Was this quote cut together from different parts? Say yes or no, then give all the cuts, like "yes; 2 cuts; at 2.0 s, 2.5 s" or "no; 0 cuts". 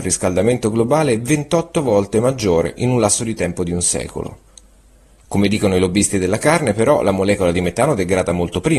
no; 0 cuts